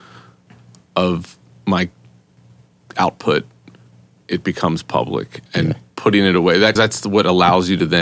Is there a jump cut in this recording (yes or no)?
yes